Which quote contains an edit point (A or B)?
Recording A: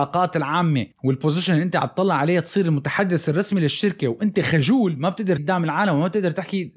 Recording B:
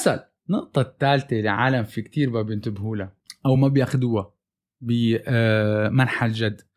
A